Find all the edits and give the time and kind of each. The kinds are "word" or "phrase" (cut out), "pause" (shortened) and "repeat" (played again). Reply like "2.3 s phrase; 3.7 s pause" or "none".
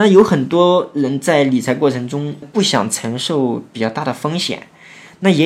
2.4 s word